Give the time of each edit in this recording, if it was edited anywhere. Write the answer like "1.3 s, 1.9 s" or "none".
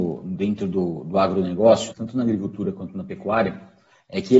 1.9 s